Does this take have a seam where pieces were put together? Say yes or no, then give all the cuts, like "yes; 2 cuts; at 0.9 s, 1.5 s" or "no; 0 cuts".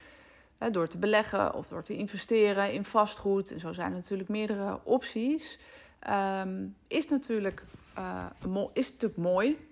no; 0 cuts